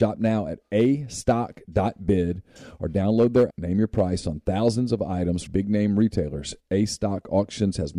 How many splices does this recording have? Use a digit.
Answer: 2